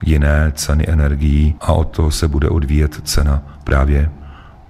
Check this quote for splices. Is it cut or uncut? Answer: uncut